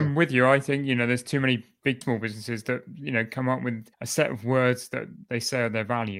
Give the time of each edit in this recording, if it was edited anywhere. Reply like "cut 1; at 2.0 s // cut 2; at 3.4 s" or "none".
cut 1; at 2.0 s // cut 2; at 3.9 s